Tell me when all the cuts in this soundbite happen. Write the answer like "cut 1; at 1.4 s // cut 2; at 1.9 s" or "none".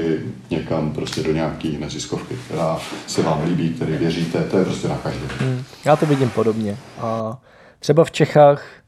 none